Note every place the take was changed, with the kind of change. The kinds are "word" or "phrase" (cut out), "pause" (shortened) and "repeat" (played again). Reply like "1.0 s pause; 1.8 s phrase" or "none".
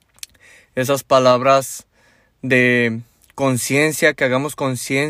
none